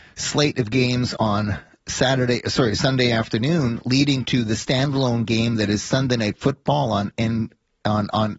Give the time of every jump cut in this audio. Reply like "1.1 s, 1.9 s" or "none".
none